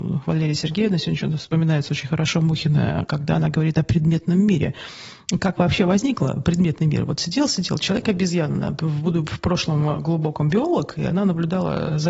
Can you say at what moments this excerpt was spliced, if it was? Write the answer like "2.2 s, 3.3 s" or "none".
none